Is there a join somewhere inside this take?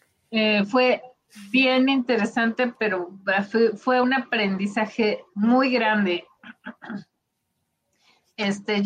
no; 0 cuts

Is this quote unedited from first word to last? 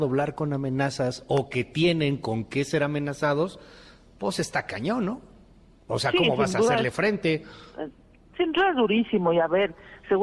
yes; 0 cuts

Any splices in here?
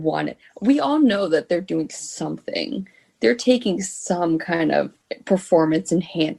no; 0 cuts

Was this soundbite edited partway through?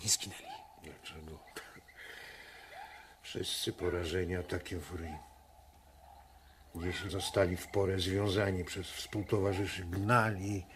yes; 1 cut; at 7.1 s

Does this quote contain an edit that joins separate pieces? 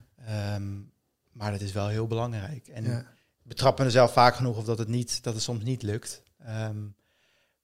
no; 0 cuts

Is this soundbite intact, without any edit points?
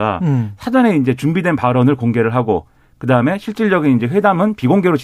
yes; 0 cuts

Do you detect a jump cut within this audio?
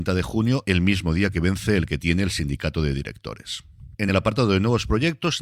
no; 0 cuts

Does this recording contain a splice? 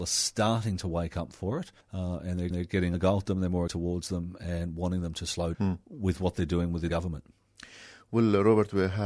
yes; 6 cuts; at 1.8 s, 2.5 s, 2.9 s, 3.7 s, 5.5 s, 6.9 s

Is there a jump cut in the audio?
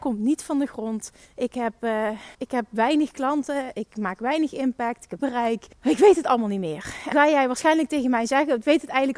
yes; 5 cuts; at 1.2 s, 2.3 s, 5.2 s, 5.7 s, 7.1 s

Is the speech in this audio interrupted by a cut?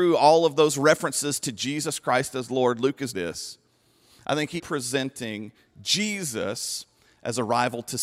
yes; 2 cuts; at 3.1 s, 4.6 s

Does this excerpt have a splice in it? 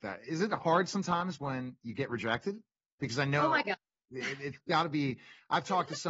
no; 0 cuts

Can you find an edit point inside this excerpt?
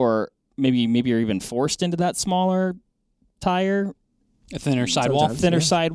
no; 0 cuts

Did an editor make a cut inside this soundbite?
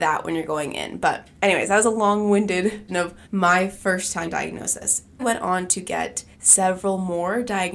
yes; 6 cuts; at 1.3 s, 2.9 s, 3.2 s, 4.3 s, 5.2 s, 6.3 s

